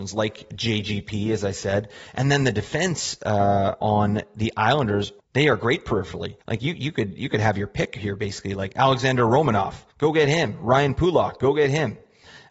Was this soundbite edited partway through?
yes; 3 cuts; at 5.2 s, 6.4 s, 9.9 s

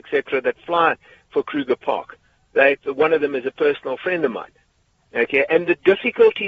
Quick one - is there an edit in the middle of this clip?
no; 0 cuts

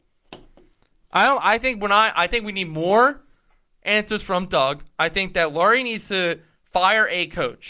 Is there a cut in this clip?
no; 0 cuts

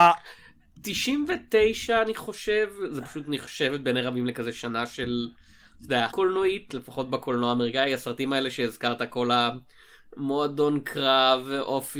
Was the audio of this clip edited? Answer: yes; 1 cut; at 6.1 s

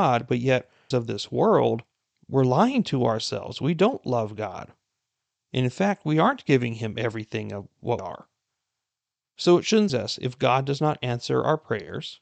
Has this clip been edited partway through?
yes; 4 cuts; at 0.9 s, 1.9 s, 8.0 s, 9.9 s

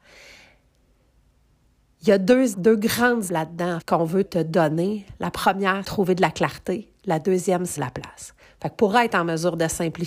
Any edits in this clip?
yes; 6 cuts; at 2.5 s, 3.3 s, 3.8 s, 4.2 s, 5.8 s, 7.8 s

